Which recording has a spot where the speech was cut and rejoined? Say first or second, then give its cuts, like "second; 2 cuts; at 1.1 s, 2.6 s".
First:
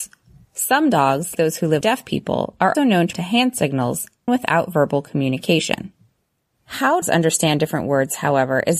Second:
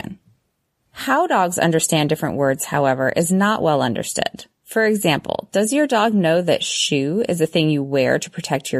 first; 6 cuts; at 1.3 s, 1.8 s, 2.7 s, 3.1 s, 4.3 s, 7.0 s